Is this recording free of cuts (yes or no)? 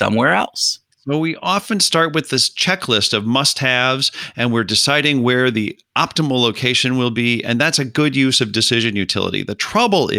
yes